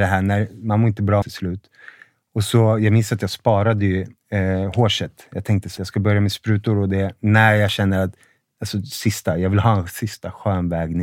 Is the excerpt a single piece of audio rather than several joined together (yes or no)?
no